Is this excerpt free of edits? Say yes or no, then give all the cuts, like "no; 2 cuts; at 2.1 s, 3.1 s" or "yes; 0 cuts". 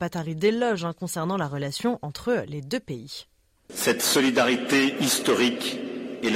yes; 0 cuts